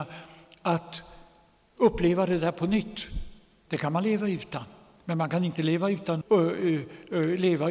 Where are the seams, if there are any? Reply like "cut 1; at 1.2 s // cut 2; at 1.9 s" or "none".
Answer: cut 1; at 6.2 s

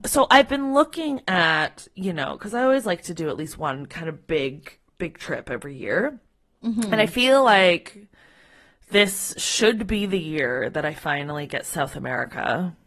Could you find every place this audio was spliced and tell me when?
none

